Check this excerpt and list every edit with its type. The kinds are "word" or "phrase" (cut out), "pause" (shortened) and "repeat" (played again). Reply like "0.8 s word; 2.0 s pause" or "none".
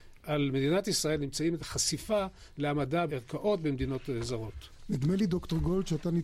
1.6 s word; 3.1 s phrase